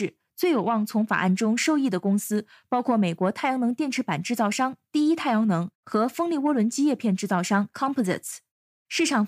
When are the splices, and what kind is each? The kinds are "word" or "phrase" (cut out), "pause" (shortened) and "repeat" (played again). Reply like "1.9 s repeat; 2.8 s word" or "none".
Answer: 7.7 s word